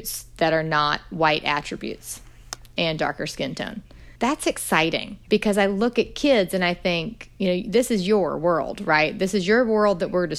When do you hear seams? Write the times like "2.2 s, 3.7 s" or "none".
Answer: 4.2 s, 5.2 s